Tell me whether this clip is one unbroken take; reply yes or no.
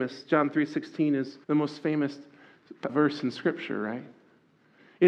no